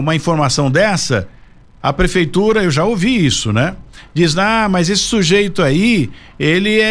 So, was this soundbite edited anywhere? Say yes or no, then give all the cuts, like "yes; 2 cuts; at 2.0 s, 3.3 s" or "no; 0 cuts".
no; 0 cuts